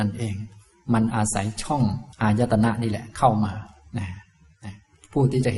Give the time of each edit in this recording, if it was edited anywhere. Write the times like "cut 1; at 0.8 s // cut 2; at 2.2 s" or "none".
cut 1; at 2.1 s